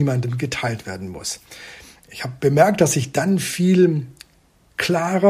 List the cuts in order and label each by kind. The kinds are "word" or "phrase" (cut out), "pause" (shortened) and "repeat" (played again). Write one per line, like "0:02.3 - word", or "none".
none